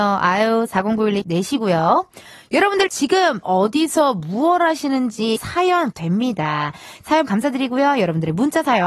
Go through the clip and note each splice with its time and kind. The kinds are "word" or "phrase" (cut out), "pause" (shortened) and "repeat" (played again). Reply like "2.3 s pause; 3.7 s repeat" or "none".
1.2 s word; 2.9 s word; 3.4 s word; 5.4 s word; 5.9 s word; 7.3 s word